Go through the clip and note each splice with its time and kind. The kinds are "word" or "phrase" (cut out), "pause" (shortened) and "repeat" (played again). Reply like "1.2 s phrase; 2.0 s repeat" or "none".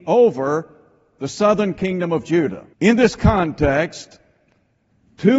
2.7 s pause